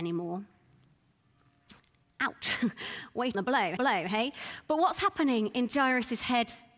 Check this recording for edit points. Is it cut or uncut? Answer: cut